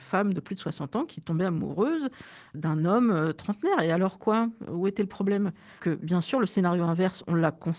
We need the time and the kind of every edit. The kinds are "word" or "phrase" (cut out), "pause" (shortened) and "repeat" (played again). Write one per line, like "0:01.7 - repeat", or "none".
0:05.8 - word